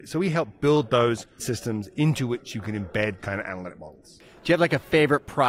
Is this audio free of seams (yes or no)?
no